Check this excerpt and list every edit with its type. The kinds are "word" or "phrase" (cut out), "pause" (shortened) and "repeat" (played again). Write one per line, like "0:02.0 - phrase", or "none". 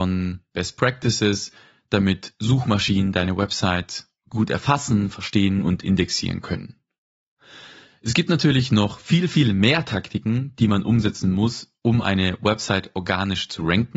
none